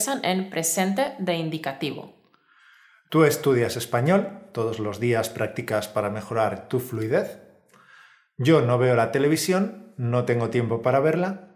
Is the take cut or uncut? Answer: uncut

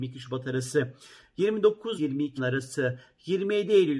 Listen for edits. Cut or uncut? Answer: cut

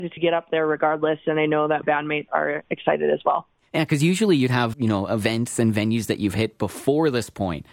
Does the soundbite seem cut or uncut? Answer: cut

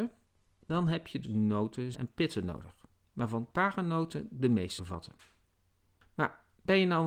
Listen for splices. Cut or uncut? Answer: cut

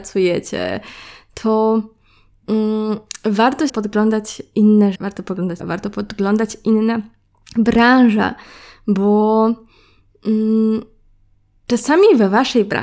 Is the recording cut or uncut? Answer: cut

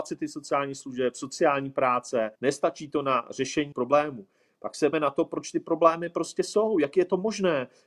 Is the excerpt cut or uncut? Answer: cut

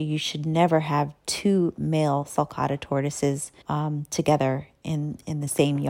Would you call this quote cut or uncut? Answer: cut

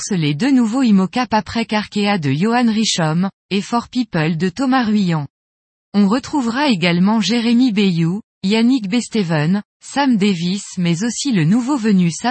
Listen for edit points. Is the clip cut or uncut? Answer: uncut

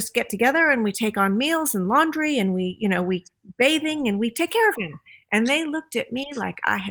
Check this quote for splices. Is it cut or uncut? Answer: uncut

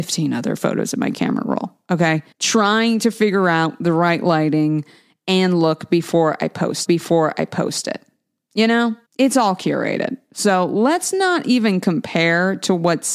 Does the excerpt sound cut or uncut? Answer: cut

